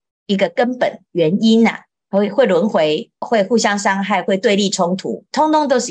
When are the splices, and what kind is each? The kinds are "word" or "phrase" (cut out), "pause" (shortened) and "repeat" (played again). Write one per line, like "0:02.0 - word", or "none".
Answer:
0:03.2 - phrase